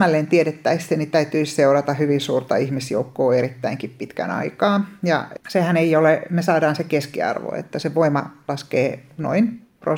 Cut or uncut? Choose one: cut